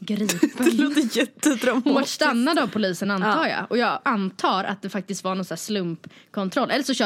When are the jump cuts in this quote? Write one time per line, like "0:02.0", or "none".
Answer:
none